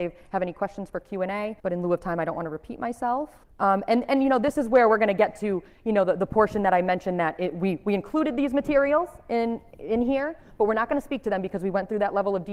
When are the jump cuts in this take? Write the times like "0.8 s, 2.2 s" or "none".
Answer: 1.6 s, 3.4 s